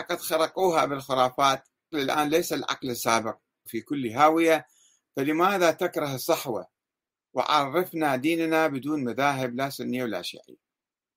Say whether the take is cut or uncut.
cut